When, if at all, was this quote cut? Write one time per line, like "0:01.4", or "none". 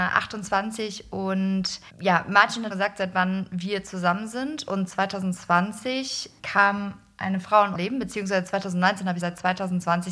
0:01.9
0:02.7
0:06.4
0:07.7
0:09.2